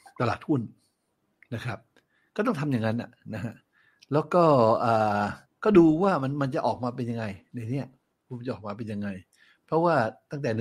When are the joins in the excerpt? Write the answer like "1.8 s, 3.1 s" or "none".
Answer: 5.5 s